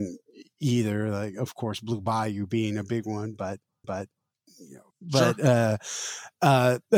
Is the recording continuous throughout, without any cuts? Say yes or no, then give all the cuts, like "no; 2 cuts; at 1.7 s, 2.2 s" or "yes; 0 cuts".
no; 2 cuts; at 3.8 s, 4.9 s